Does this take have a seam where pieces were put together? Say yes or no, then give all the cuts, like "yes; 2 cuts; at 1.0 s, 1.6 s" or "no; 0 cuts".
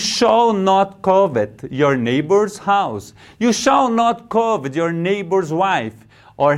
no; 0 cuts